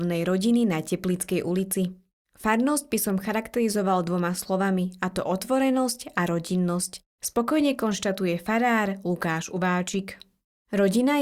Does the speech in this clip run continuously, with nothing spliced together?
yes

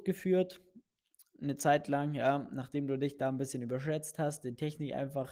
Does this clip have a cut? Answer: no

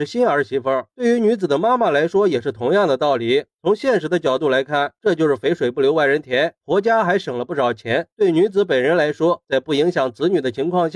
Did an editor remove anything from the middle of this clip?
yes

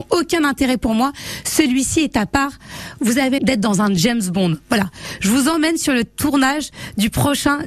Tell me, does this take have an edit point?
yes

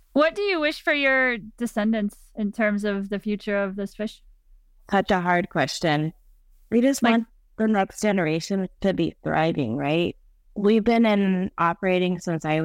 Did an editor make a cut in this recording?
no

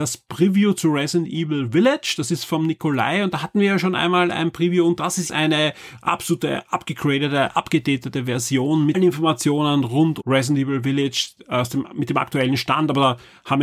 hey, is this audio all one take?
no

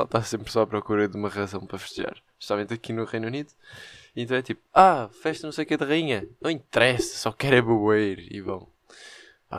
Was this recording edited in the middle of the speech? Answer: no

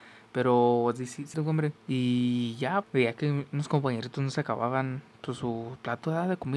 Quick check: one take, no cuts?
no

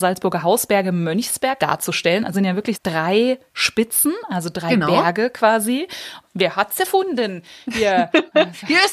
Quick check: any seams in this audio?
yes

